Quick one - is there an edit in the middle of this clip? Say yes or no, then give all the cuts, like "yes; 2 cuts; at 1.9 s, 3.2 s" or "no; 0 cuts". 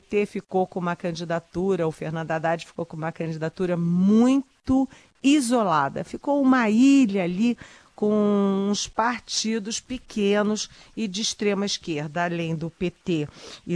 no; 0 cuts